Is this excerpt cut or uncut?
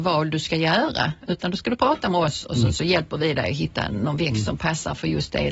uncut